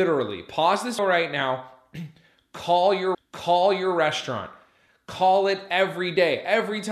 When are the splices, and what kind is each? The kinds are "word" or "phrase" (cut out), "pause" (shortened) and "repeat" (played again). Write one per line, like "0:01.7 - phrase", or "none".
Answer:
0:01.0 - word
0:03.1 - repeat